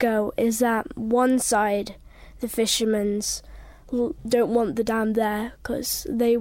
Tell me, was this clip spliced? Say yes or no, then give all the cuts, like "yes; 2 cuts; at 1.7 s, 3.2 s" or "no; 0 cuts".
no; 0 cuts